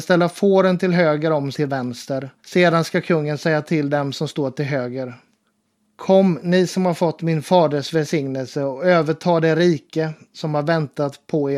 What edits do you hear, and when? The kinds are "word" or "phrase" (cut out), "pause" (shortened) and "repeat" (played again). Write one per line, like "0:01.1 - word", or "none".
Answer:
0:01.5 - phrase
0:02.4 - pause
0:05.5 - pause